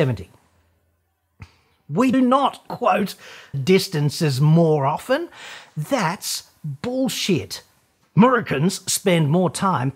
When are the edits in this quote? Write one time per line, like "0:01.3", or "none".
0:02.1
0:02.7
0:03.5